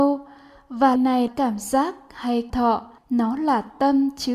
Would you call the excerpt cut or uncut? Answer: cut